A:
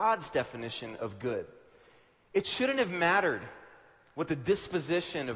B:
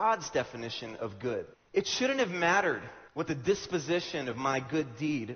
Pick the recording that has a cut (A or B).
B